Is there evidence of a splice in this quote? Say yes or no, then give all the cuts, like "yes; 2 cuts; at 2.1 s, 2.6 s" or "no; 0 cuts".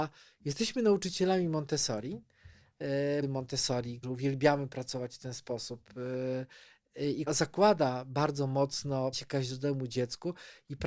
yes; 4 cuts; at 3.2 s, 4.0 s, 7.3 s, 9.1 s